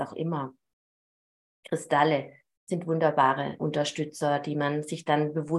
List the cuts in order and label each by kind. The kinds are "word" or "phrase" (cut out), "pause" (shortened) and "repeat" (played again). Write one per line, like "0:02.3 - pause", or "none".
0:03.6 - word